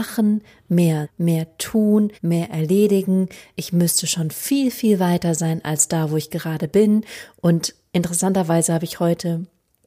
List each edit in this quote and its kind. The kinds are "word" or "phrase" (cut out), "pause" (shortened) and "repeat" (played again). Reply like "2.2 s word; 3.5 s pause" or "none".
1.0 s word; 2.1 s pause

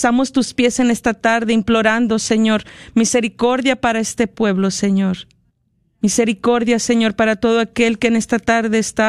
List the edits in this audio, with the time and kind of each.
5.5 s pause

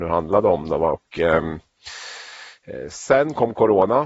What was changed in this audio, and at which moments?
none

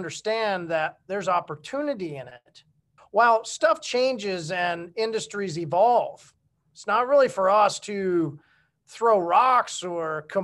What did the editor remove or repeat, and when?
3.0 s pause

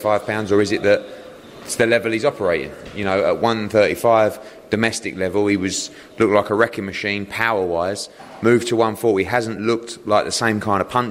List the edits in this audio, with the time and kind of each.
none

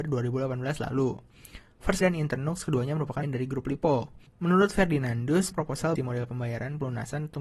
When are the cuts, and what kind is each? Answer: 2.0 s word; 3.2 s word; 4.3 s pause; 5.5 s word; 6.0 s word

